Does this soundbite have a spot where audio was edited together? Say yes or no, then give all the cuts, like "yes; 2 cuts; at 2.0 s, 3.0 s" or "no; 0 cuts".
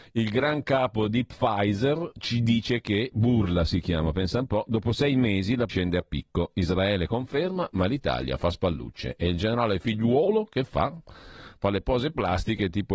yes; 1 cut; at 5.7 s